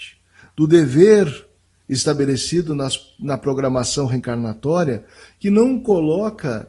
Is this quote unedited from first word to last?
yes; 0 cuts

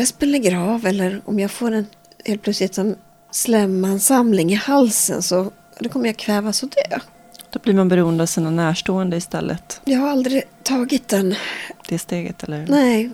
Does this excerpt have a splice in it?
no; 0 cuts

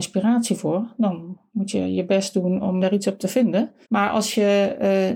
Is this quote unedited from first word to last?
no; 2 cuts; at 2.8 s, 3.8 s

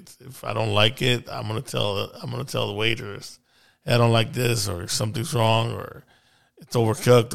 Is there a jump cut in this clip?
no; 0 cuts

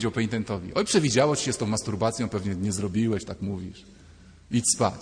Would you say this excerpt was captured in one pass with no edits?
no; 1 cut; at 3.3 s

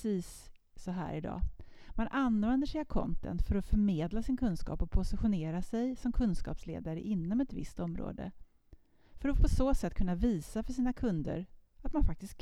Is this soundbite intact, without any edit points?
yes; 0 cuts

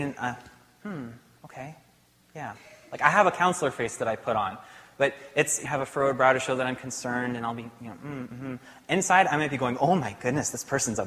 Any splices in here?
yes; 1 cut; at 5.7 s

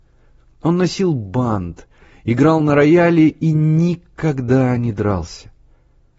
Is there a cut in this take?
no; 0 cuts

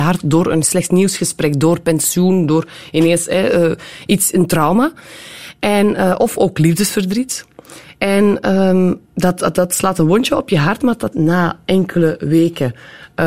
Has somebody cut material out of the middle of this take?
yes; 2 cuts; at 9.1 s, 11.1 s

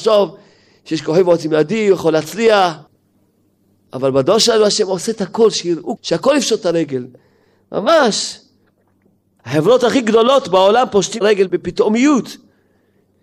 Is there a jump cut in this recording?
yes; 1 cut; at 6.0 s

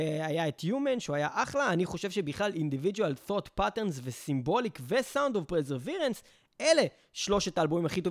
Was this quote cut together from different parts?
no; 0 cuts

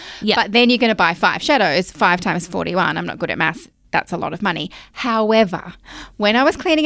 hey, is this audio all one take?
yes; 0 cuts

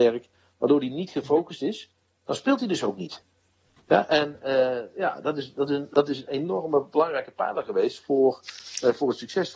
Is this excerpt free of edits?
yes; 0 cuts

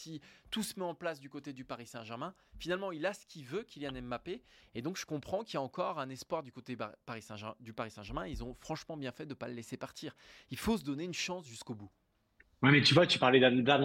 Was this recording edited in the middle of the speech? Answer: no; 0 cuts

